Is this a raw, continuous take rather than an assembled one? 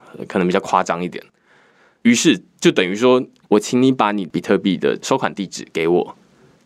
no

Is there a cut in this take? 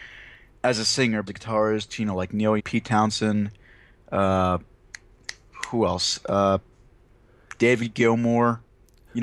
yes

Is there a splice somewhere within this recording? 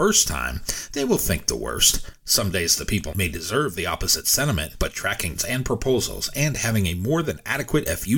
yes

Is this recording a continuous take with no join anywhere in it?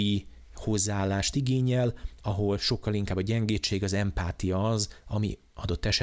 yes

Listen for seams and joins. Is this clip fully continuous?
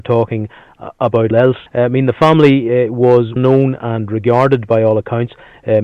no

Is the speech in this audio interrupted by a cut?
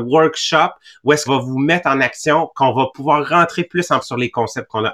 yes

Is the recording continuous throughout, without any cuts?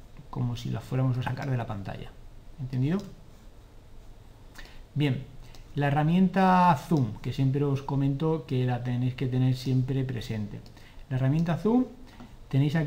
yes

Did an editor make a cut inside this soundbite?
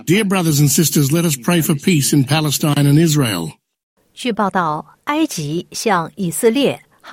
no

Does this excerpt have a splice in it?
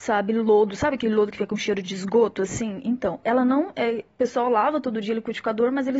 no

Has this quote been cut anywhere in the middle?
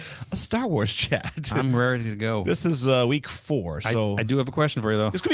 no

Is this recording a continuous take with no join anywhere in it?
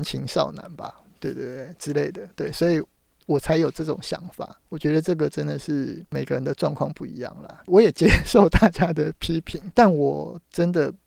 yes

